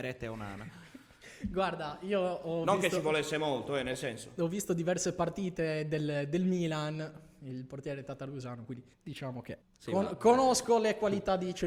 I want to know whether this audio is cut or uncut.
cut